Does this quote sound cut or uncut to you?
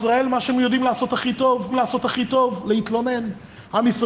cut